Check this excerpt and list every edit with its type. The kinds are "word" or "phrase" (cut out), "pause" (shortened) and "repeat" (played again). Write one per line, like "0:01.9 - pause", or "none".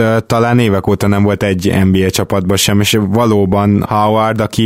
none